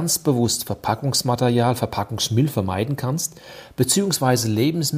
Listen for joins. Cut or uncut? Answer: uncut